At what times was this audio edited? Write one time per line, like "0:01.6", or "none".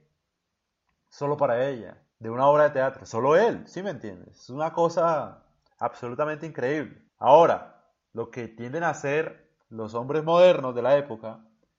0:02.1
0:05.7
0:07.1
0:09.6